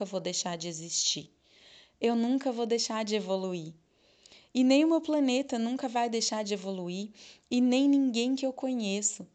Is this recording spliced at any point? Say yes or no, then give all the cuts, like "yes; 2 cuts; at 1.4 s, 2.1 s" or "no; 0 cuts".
no; 0 cuts